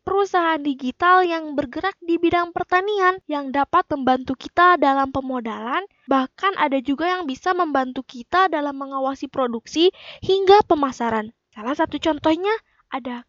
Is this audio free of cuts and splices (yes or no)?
yes